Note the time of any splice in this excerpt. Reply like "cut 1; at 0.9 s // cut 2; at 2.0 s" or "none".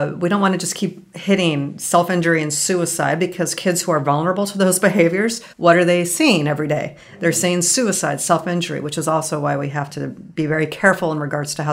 cut 1; at 5.5 s